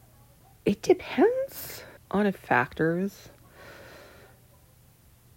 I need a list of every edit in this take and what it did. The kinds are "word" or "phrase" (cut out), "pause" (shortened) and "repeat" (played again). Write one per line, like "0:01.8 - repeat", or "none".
0:02.0 - pause
0:02.3 - word